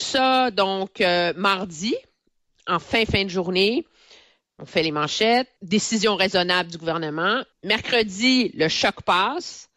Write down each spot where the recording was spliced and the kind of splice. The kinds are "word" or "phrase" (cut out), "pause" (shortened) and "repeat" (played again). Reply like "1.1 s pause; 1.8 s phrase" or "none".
3.1 s word; 5.6 s pause; 7.5 s pause